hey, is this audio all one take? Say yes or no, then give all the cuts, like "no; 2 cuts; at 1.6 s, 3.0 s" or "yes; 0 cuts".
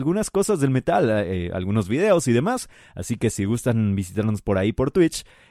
yes; 0 cuts